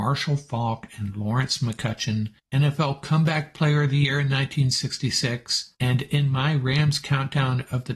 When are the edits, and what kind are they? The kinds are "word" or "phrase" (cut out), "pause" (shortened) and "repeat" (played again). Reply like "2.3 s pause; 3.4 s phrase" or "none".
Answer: 5.7 s pause